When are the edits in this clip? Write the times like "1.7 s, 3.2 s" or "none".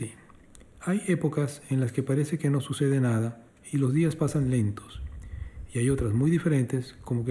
none